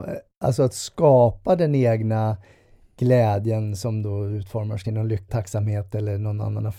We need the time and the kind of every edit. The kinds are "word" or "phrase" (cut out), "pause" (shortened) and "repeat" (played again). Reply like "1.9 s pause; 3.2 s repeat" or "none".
4.8 s word; 5.3 s word